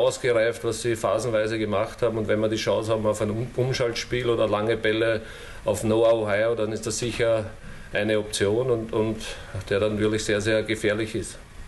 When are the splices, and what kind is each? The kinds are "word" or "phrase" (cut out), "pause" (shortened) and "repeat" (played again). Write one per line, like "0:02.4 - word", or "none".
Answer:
none